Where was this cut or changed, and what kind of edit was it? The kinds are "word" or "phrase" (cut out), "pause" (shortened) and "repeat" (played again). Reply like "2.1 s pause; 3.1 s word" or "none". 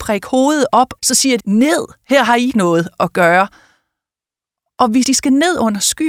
1.0 s word; 1.4 s word; 2.5 s word; 5.0 s word